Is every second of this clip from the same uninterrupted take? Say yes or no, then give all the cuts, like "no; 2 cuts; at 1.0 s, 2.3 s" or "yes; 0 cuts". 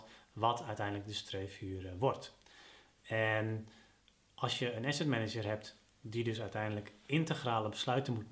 yes; 0 cuts